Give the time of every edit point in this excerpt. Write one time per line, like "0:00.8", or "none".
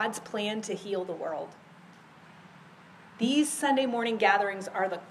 none